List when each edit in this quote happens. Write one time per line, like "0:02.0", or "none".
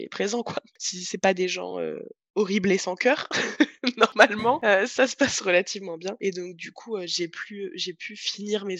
none